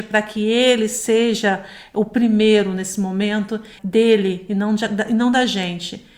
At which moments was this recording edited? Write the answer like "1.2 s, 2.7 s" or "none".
3.8 s